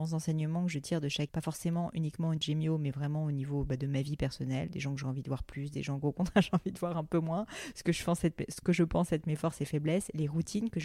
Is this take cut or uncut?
cut